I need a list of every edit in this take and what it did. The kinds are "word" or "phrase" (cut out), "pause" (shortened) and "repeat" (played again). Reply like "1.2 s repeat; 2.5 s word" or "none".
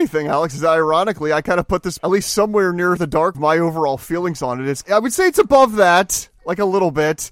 2.0 s word; 3.0 s word; 3.3 s phrase; 4.8 s word